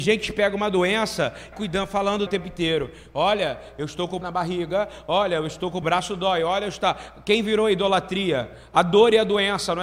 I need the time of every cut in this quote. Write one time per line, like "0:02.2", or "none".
0:01.5
0:02.3
0:04.2
0:05.8